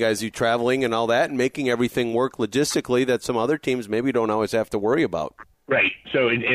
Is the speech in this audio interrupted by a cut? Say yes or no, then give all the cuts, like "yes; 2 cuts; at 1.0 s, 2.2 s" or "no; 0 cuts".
no; 0 cuts